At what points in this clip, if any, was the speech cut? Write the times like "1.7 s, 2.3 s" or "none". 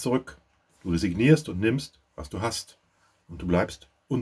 none